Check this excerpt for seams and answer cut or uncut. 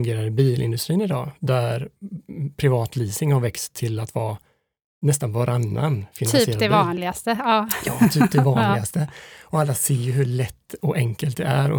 uncut